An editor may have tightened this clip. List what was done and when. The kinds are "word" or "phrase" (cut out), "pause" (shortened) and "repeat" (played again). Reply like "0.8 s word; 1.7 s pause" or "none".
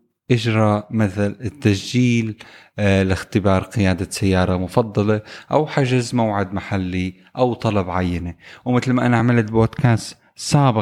none